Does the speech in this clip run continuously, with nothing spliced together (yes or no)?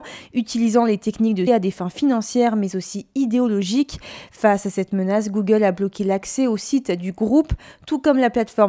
no